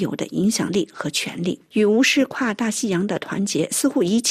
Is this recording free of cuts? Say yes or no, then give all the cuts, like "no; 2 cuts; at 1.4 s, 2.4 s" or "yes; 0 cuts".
no; 1 cut; at 1.7 s